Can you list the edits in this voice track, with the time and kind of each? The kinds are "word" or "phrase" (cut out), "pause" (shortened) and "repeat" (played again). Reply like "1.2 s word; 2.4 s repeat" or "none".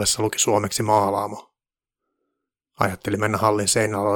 none